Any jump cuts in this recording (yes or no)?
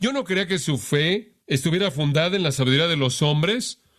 yes